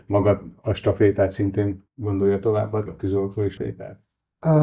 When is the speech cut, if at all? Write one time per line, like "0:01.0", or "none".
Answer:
0:01.9
0:02.9
0:03.6